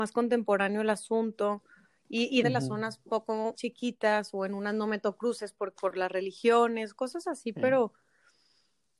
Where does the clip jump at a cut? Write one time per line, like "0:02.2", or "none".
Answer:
0:02.4
0:03.5
0:05.8